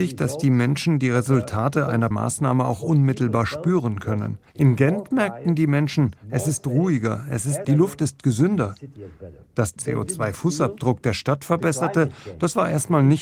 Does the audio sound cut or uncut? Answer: cut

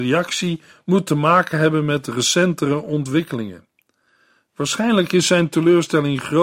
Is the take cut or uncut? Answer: uncut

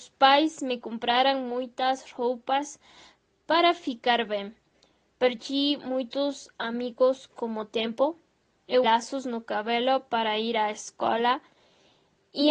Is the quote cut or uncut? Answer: cut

